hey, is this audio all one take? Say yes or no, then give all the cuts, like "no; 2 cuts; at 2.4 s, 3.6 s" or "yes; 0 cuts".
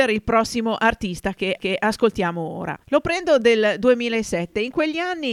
no; 3 cuts; at 1.6 s, 2.8 s, 3.4 s